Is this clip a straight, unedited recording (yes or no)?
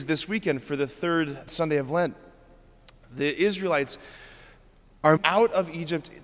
no